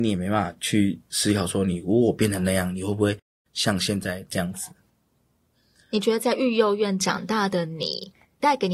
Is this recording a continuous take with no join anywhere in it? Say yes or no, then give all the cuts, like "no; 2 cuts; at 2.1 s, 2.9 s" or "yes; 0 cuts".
yes; 0 cuts